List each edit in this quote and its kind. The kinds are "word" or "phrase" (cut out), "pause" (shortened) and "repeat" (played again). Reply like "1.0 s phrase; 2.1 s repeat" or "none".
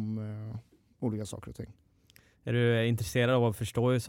none